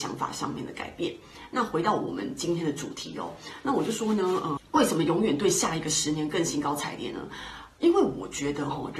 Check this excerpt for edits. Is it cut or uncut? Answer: cut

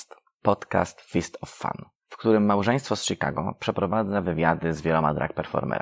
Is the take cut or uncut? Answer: cut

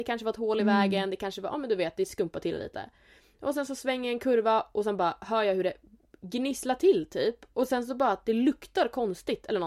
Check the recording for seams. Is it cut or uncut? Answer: uncut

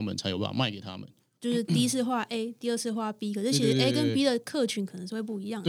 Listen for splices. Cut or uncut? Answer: uncut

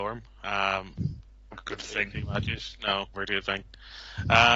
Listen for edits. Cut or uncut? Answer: cut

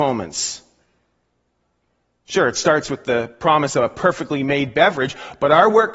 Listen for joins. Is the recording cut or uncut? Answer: uncut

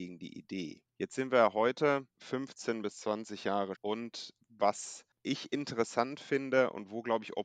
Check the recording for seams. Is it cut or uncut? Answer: cut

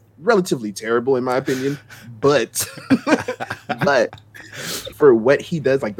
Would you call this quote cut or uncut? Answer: cut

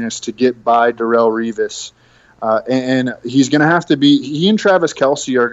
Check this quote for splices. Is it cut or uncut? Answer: uncut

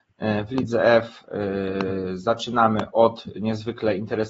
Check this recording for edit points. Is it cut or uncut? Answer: uncut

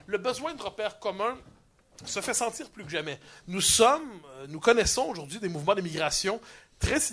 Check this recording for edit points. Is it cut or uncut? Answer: uncut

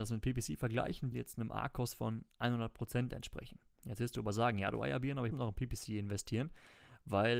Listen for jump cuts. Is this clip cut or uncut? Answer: cut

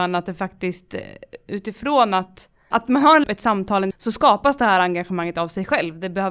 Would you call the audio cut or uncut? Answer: cut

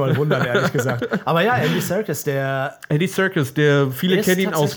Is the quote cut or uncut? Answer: uncut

